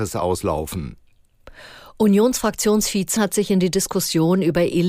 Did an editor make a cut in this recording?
yes; 1 cut; at 3.2 s

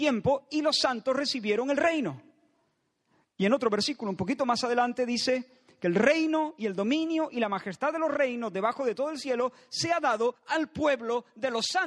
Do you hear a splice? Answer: no; 0 cuts

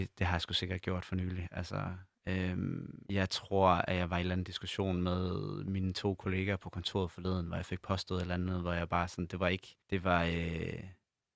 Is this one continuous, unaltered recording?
no; 2 cuts; at 3.1 s, 9.8 s

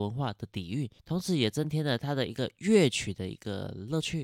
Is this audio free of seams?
no; 1 cut; at 1.0 s

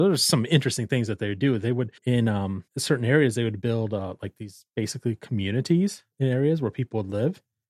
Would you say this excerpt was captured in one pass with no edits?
no; 3 cuts; at 2.0 s, 2.7 s, 6.1 s

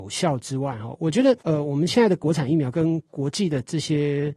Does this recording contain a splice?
yes; 1 cut; at 1.4 s

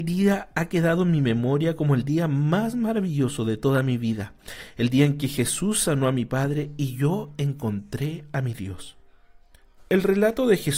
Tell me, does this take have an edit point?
no; 0 cuts

